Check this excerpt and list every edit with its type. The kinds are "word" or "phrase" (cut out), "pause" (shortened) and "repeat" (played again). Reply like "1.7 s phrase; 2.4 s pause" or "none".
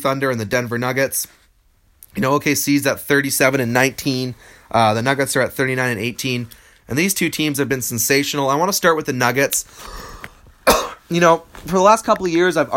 none